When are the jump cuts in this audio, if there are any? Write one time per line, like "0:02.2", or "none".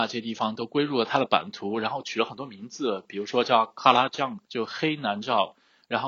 0:04.4